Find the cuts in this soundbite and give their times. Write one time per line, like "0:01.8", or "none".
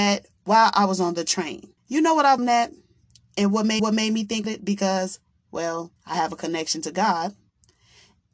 0:01.8
0:02.4
0:03.8
0:04.4
0:06.0